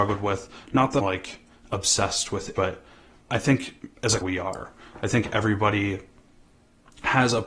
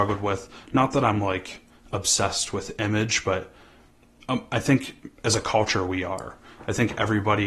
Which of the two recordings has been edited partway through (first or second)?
first